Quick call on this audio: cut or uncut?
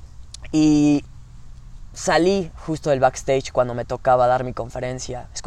uncut